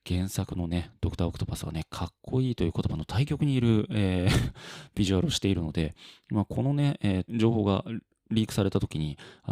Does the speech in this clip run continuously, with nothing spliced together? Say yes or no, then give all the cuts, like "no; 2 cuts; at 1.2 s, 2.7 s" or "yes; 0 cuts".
no; 1 cut; at 7.3 s